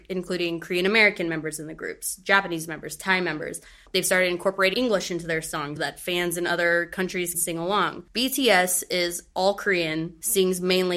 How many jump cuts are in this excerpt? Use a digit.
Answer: 3